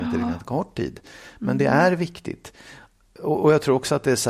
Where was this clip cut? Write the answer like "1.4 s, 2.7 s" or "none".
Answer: none